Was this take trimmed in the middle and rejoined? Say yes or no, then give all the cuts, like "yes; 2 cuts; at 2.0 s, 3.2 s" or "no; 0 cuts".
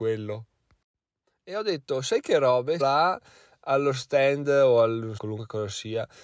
yes; 2 cuts; at 2.8 s, 5.2 s